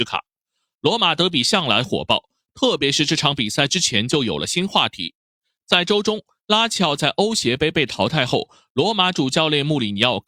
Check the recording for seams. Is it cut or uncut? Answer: uncut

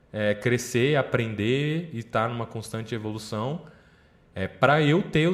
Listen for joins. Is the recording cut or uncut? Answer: uncut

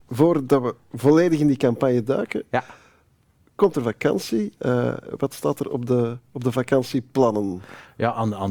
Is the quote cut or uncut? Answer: uncut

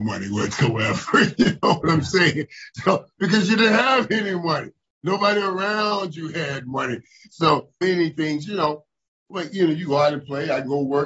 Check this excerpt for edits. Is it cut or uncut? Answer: cut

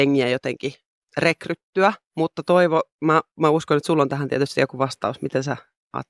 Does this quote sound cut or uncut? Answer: uncut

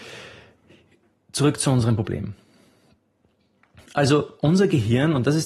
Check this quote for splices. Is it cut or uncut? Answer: uncut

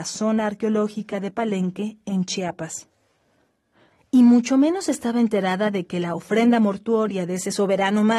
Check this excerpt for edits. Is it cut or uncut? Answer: uncut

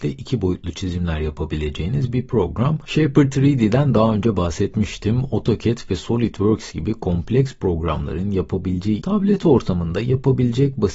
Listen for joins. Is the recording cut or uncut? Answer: cut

